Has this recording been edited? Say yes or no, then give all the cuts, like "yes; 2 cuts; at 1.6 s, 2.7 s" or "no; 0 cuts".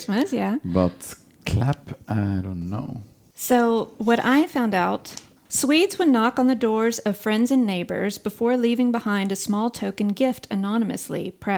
no; 0 cuts